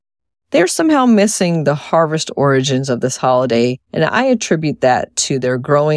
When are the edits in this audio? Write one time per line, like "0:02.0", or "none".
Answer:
0:03.8